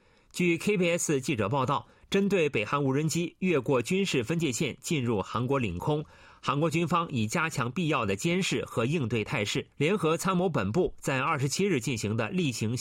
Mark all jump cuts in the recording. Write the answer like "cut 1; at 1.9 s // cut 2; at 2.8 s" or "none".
cut 1; at 9.7 s